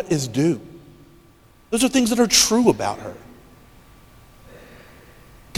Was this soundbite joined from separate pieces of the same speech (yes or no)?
no